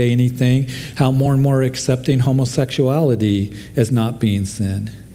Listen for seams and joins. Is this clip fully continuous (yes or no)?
yes